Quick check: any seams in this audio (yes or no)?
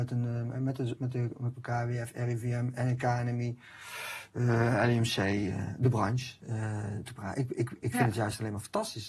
yes